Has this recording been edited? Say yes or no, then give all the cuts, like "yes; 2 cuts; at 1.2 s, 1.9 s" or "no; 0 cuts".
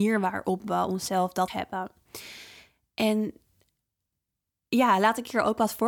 yes; 1 cut; at 1.5 s